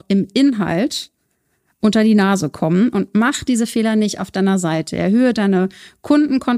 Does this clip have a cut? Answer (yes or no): no